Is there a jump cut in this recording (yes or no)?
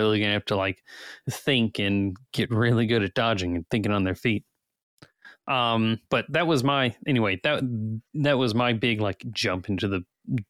yes